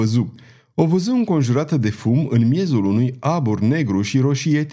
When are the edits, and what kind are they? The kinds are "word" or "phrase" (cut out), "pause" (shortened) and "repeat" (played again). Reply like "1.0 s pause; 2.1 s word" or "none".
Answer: none